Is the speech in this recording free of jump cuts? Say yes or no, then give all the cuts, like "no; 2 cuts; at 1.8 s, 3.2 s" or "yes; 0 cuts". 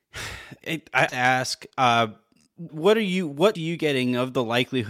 no; 3 cuts; at 1.1 s, 2.7 s, 3.5 s